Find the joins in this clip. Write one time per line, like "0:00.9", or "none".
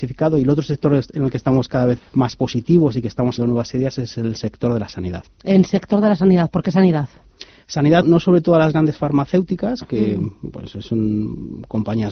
0:02.0
0:03.4
0:05.3
0:08.0